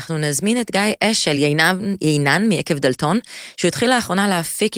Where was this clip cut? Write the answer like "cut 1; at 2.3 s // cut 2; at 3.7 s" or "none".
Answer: none

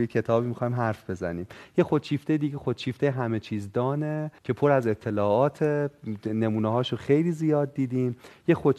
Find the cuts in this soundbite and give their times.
cut 1; at 4.4 s

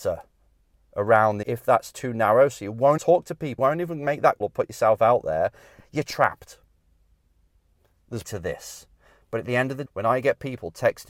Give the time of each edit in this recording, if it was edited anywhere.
cut 1; at 1.4 s // cut 2; at 3.0 s // cut 3; at 3.6 s // cut 4; at 4.4 s // cut 5; at 8.2 s // cut 6; at 9.9 s

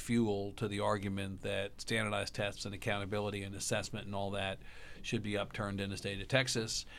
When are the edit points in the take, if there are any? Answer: none

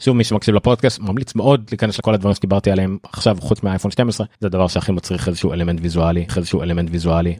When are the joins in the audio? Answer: cut 1; at 2.0 s // cut 2; at 4.3 s // cut 3; at 6.3 s

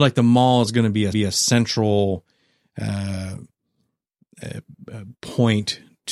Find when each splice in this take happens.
cut 1; at 1.1 s

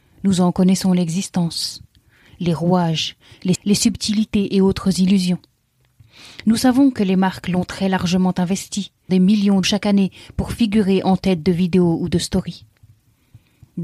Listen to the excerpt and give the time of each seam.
cut 1; at 3.6 s // cut 2; at 9.1 s // cut 3; at 9.6 s

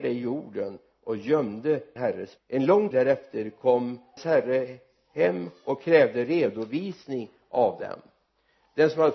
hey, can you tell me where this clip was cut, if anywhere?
cut 1; at 2.0 s // cut 2; at 2.4 s // cut 3; at 2.9 s // cut 4; at 4.2 s

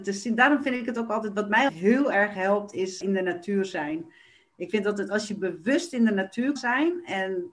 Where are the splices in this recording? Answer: cut 1; at 1.7 s // cut 2; at 3.0 s // cut 3; at 6.6 s

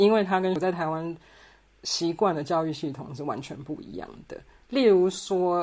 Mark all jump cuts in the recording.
none

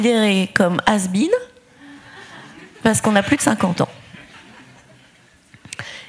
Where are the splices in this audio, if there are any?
none

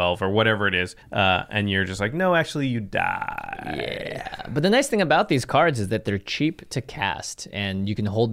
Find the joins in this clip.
cut 1; at 1.0 s

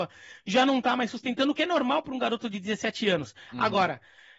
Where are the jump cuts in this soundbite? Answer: none

